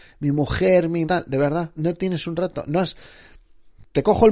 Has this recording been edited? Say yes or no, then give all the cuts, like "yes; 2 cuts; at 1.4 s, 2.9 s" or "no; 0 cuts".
yes; 2 cuts; at 1.0 s, 1.8 s